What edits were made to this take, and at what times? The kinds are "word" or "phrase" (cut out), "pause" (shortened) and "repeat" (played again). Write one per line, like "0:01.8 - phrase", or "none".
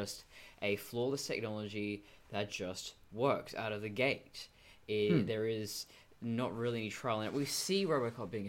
none